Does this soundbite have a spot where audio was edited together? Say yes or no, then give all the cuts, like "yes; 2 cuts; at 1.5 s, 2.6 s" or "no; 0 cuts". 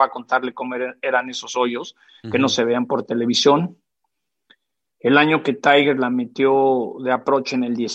no; 0 cuts